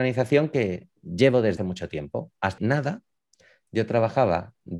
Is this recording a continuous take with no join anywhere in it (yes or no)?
no